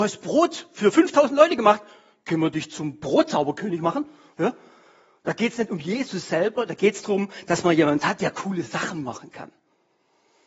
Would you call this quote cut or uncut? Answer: uncut